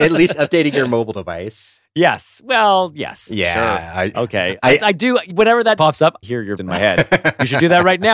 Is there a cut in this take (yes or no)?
yes